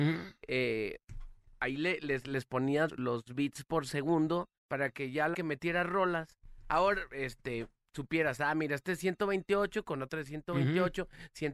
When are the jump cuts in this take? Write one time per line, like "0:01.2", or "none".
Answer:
0:02.9
0:04.6
0:05.3